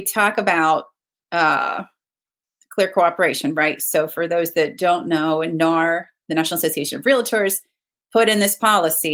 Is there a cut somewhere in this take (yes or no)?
no